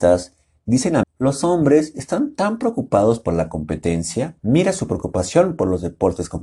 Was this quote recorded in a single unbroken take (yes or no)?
no